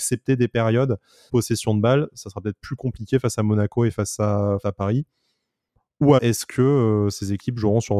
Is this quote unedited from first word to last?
no; 3 cuts; at 1.3 s, 4.6 s, 6.2 s

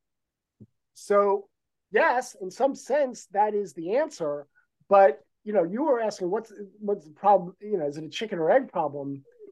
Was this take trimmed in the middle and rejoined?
no; 0 cuts

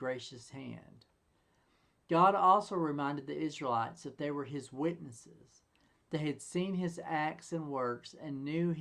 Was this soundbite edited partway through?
no; 0 cuts

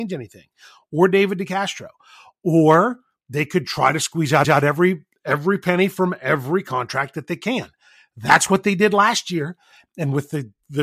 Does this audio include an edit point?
yes; 1 cut; at 4.4 s

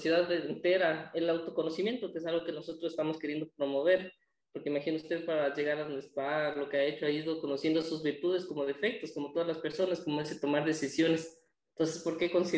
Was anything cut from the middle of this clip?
no; 0 cuts

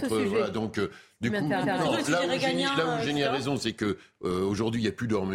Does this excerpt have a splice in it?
yes; 1 cut; at 1.6 s

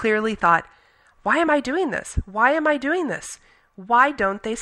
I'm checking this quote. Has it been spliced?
no; 0 cuts

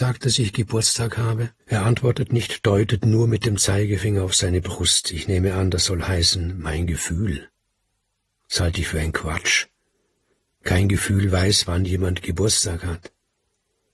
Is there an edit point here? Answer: yes; 1 cut; at 1.6 s

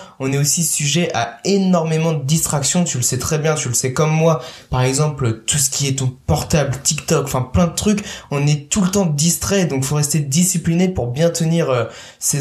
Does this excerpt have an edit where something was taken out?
no; 0 cuts

